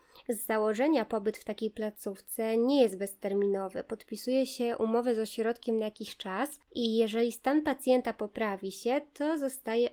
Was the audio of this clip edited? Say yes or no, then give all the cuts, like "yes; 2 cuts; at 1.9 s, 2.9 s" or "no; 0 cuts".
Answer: yes; 1 cut; at 6.7 s